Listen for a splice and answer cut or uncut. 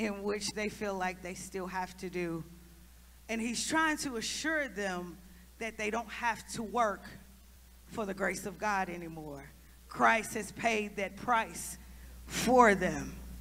uncut